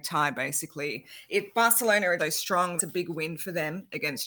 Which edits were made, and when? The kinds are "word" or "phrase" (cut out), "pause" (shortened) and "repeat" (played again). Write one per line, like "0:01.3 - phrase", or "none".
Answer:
0:02.2 - word
0:02.8 - word